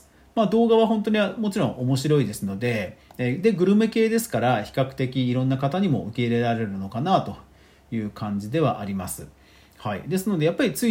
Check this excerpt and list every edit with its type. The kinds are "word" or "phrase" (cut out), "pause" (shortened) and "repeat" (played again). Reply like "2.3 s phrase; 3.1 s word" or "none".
none